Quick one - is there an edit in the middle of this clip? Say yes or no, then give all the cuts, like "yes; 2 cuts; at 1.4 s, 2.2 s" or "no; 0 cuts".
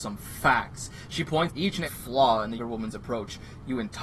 yes; 3 cuts; at 1.5 s, 1.9 s, 2.6 s